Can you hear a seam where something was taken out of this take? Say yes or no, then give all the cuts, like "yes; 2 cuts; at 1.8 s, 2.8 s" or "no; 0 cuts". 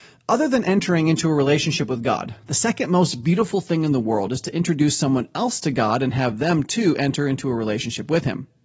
no; 0 cuts